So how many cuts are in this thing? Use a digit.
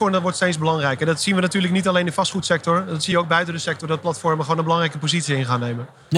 0